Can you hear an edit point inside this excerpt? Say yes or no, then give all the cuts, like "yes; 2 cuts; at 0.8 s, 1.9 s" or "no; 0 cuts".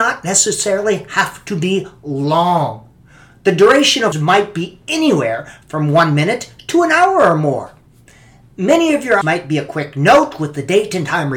yes; 2 cuts; at 4.1 s, 9.2 s